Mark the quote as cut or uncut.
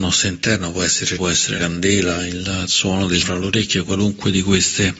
cut